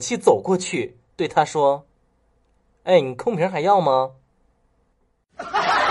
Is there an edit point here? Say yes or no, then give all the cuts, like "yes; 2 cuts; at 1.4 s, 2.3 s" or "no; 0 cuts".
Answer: yes; 2 cuts; at 1.1 s, 1.9 s